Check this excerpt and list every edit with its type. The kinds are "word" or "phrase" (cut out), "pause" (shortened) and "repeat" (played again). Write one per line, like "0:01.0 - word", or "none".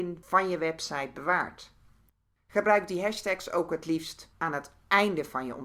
none